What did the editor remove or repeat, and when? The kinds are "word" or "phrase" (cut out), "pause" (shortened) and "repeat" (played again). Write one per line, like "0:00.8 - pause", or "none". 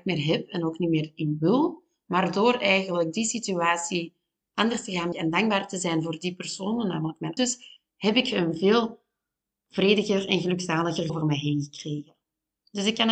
0:05.1 - word
0:07.4 - word
0:07.9 - pause
0:11.1 - word